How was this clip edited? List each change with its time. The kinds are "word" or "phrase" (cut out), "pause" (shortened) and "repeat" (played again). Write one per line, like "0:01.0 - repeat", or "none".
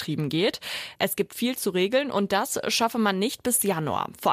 none

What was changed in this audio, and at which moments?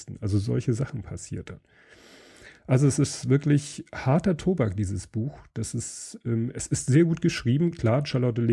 none

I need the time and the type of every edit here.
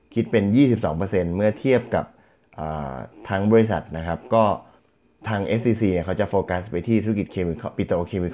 0:04.8 - pause

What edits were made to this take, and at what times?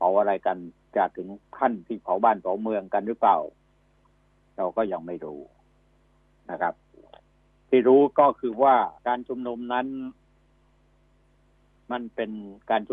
0:09.0 - pause

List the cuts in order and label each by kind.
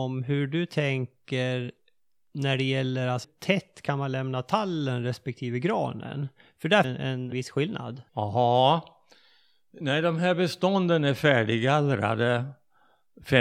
0:03.2 - word
0:06.8 - phrase
0:07.3 - word
0:08.1 - pause

